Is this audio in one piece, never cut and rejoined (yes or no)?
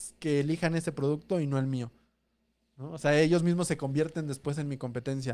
yes